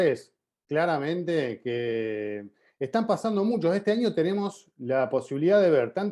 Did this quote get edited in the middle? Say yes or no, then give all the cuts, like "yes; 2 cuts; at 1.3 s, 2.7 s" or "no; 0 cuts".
no; 0 cuts